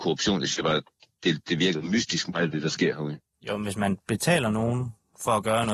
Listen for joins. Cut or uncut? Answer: uncut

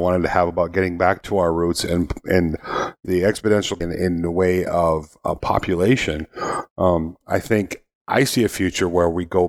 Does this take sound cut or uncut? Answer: cut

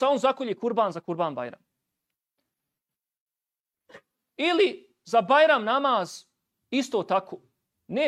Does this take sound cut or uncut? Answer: uncut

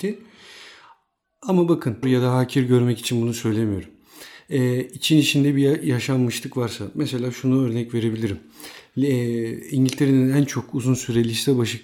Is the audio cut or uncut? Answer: cut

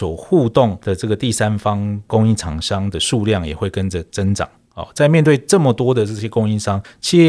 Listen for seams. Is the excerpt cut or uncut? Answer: uncut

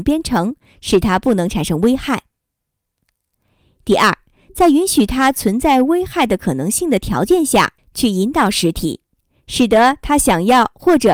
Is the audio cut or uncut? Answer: uncut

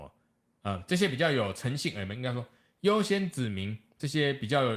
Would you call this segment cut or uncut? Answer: uncut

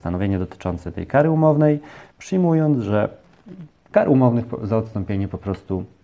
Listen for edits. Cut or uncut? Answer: uncut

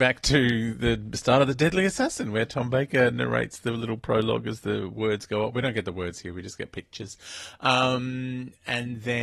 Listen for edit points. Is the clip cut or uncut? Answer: uncut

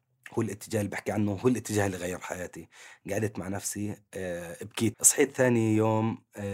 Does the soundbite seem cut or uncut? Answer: cut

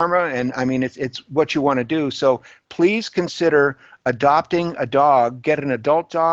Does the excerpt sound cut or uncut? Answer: uncut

